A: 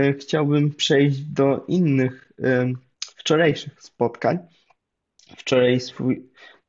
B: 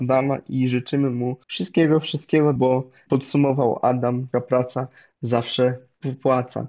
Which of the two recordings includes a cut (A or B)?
B